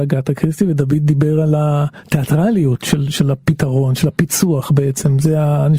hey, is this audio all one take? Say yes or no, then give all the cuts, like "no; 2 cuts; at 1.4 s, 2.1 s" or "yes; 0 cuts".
yes; 0 cuts